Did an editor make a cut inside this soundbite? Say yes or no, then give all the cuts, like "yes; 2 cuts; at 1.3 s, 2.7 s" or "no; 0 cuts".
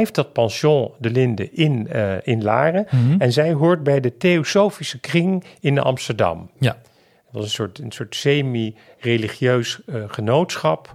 no; 0 cuts